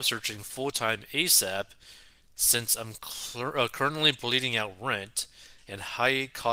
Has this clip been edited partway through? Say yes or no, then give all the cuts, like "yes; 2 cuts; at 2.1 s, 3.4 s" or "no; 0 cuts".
no; 0 cuts